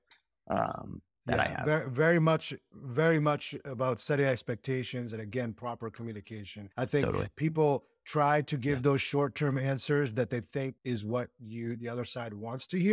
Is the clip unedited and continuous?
no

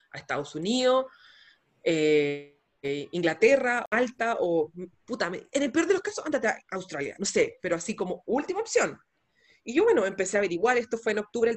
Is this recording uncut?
yes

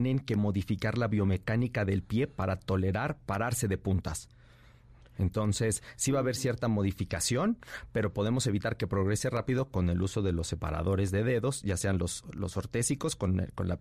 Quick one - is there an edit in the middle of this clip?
no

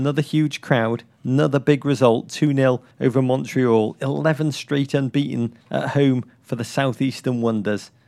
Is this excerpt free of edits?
no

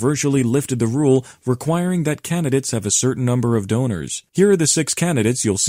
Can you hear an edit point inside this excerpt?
yes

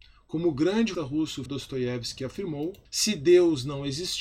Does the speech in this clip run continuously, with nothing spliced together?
no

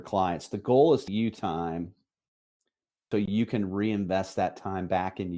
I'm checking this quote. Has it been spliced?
yes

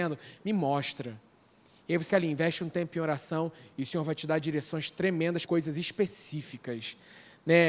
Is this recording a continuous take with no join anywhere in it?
no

